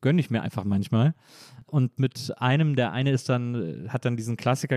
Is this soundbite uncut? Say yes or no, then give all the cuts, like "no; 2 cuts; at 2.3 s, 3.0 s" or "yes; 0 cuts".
yes; 0 cuts